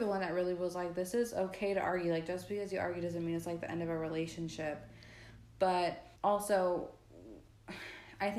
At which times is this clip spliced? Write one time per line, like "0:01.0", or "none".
0:06.2